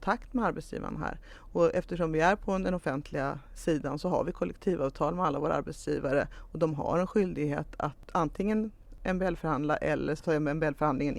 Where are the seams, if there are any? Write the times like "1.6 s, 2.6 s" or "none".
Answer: none